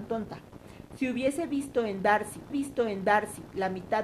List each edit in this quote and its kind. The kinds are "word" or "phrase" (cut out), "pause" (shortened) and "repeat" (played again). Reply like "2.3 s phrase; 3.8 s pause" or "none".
2.5 s repeat

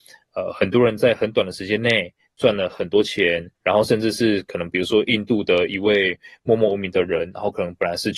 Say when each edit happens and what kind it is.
3.6 s pause

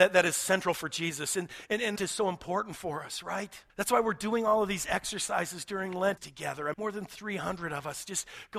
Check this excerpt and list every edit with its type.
2.0 s phrase; 3.7 s pause; 6.2 s phrase; 6.7 s word

